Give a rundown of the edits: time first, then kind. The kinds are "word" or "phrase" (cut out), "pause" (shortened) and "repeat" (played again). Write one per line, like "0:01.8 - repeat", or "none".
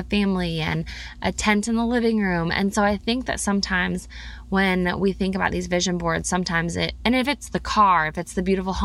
none